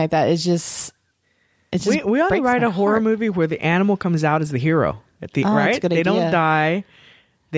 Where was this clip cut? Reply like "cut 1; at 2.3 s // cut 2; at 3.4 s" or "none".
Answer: none